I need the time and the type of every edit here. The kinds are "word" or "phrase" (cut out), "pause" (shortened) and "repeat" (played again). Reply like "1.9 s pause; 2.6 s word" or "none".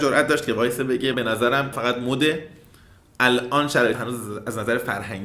1.1 s word; 1.7 s word; 3.9 s word